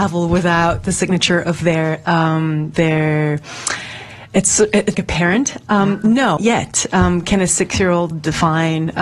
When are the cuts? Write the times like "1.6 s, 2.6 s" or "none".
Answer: 2.8 s, 4.9 s, 6.4 s, 8.1 s